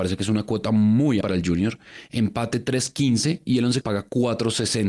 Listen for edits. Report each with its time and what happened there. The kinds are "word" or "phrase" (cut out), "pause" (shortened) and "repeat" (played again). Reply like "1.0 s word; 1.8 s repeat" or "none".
1.2 s word; 3.8 s word